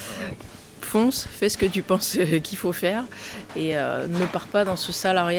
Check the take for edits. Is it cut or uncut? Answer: uncut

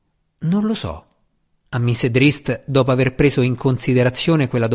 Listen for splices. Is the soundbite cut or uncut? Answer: uncut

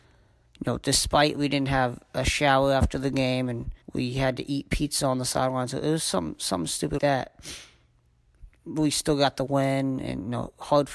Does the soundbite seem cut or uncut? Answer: cut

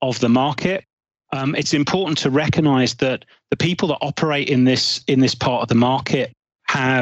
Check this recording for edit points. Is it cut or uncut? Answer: uncut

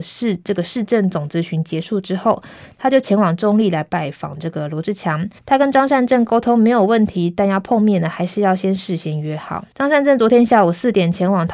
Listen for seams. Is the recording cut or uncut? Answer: cut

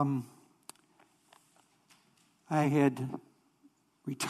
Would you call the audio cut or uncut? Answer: uncut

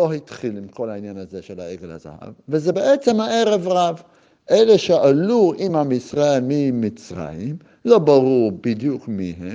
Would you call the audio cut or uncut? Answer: uncut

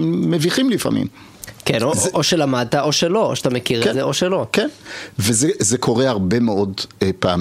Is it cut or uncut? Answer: uncut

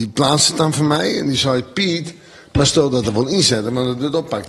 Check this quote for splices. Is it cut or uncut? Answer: uncut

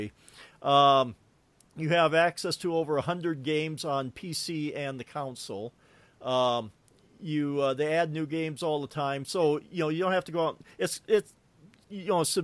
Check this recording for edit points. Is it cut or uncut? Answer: uncut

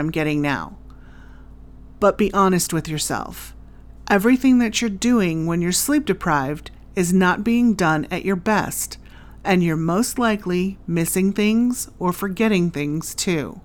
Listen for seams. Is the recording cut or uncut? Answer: uncut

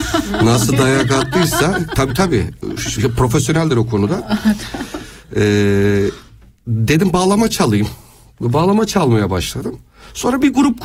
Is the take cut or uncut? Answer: uncut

